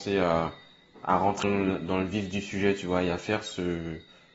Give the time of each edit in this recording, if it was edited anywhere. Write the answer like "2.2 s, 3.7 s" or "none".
1.4 s